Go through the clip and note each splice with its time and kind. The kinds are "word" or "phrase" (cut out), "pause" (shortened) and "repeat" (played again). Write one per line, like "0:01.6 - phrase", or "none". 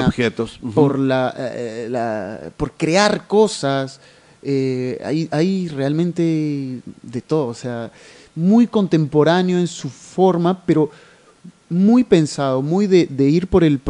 none